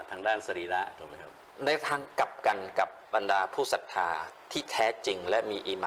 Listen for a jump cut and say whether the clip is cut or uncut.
cut